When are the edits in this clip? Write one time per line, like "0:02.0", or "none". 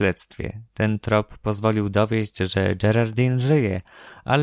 none